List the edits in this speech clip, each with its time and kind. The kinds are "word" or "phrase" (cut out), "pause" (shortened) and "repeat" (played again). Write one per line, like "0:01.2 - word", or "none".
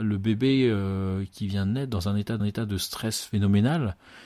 0:02.4 - repeat